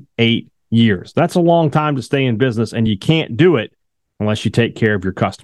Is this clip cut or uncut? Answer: uncut